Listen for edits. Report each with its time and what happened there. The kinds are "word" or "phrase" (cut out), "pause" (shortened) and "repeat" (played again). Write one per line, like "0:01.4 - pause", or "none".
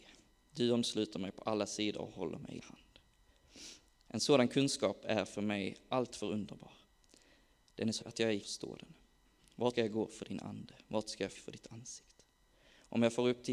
0:02.6 - word
0:08.0 - word
0:08.4 - word
0:09.7 - word
0:11.3 - word